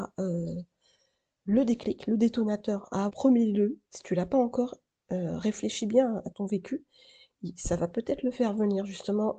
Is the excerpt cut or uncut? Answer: cut